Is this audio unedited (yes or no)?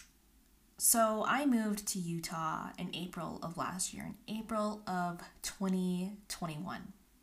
yes